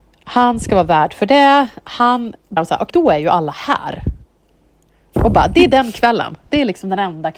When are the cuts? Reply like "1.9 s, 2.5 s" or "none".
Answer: 2.6 s, 2.9 s

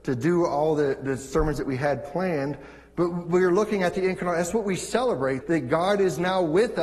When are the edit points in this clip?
5.4 s

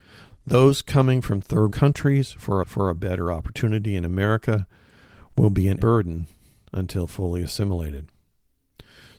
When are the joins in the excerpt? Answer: 1.7 s, 2.6 s, 5.8 s

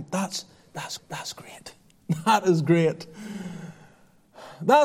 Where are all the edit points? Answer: 1.0 s

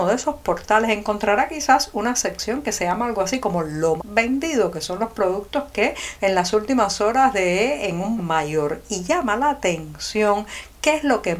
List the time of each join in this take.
4.0 s, 6.2 s, 8.2 s

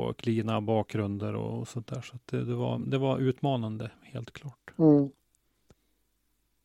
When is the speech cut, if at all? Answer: none

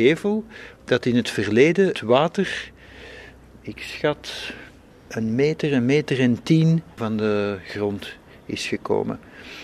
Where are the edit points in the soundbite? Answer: 1.9 s, 4.9 s, 7.0 s

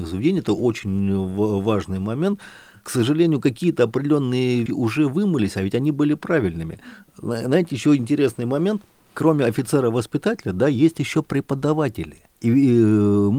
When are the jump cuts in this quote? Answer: 4.7 s

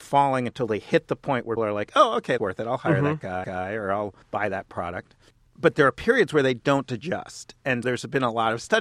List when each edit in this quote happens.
1.6 s, 2.4 s, 3.4 s, 4.2 s, 5.3 s, 7.8 s

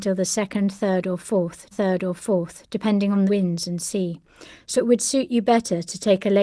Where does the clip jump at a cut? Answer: 1.7 s, 3.3 s, 4.7 s

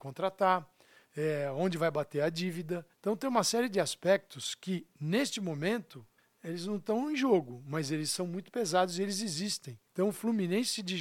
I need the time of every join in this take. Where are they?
2.9 s, 6.2 s, 9.9 s

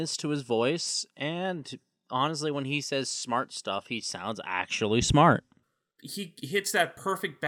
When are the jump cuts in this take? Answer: none

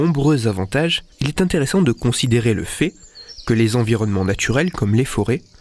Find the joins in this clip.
1.1 s

